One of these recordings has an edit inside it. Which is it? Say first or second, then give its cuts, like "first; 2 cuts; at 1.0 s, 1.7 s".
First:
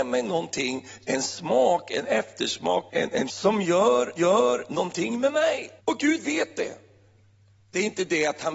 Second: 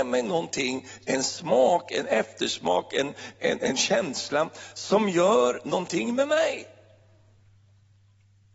first; 4 cuts; at 2.9 s, 3.3 s, 4.2 s, 5.8 s